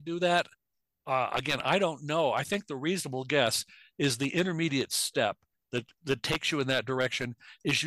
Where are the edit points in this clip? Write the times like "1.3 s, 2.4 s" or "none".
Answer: none